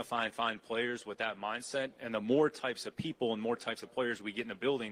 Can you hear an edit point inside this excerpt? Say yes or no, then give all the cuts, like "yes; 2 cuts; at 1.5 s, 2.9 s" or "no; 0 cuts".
no; 0 cuts